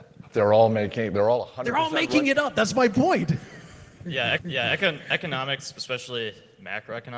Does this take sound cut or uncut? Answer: cut